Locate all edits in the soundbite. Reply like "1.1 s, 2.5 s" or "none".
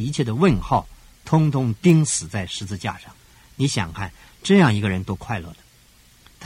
3.1 s